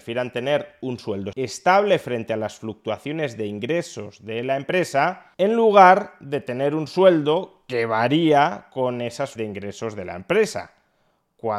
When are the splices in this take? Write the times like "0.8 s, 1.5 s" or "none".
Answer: 1.3 s, 5.3 s, 9.4 s